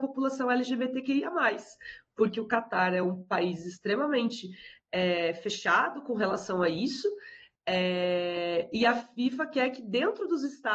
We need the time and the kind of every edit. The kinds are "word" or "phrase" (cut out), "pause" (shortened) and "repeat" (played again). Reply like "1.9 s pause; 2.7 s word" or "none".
none

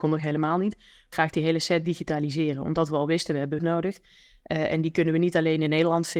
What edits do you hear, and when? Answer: 1.1 s word; 3.6 s word

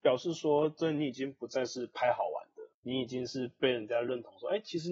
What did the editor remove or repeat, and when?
2.7 s pause

